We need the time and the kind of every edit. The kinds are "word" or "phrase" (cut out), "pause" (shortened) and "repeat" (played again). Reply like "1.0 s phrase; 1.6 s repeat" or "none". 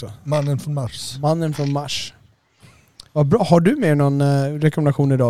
3.1 s pause

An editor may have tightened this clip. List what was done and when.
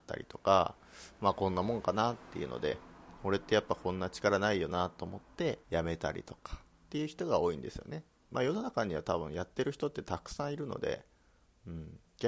5.6 s pause; 8.3 s phrase

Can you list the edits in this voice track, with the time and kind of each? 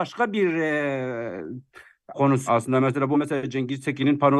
2.1 s word; 2.5 s word; 3.1 s word

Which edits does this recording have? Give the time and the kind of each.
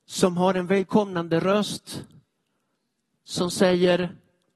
none

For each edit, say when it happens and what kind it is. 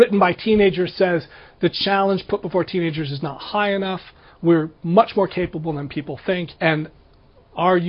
6.6 s pause

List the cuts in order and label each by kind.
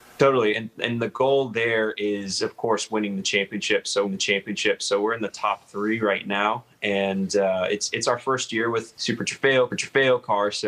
4.0 s repeat; 8.9 s phrase; 9.7 s repeat

